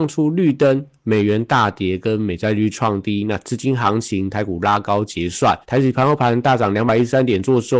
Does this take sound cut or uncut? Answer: cut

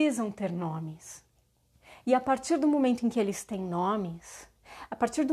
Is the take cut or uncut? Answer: uncut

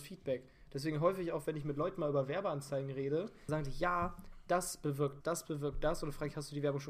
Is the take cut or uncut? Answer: cut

